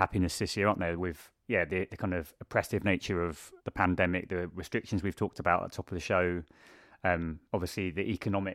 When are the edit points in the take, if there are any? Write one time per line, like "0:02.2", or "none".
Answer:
0:03.6
0:07.5